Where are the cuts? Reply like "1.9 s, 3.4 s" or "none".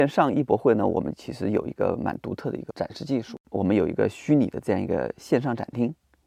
2.7 s